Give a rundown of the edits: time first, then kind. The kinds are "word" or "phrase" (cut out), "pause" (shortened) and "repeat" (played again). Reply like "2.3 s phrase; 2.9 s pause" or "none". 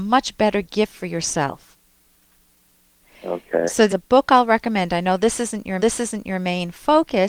3.9 s phrase; 5.8 s repeat